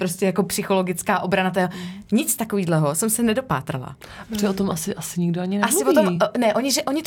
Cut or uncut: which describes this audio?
uncut